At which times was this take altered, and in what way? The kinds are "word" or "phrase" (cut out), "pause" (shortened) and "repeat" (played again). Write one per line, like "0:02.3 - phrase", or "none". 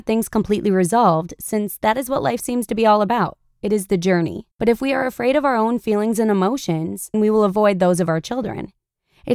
0:04.5 - pause
0:07.1 - word